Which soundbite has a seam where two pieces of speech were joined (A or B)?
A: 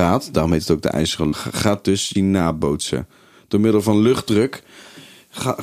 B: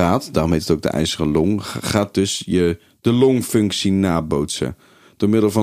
A